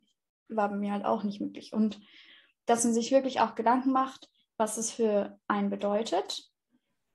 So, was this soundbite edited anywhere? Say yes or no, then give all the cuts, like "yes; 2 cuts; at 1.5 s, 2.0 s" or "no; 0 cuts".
no; 0 cuts